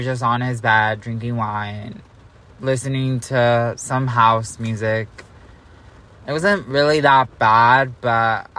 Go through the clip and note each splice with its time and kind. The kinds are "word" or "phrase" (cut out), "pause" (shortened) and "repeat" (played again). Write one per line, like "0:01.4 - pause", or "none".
none

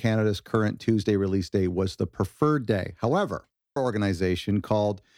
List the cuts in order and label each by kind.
0:03.8 - word

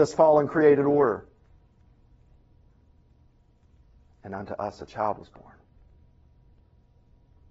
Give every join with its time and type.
none

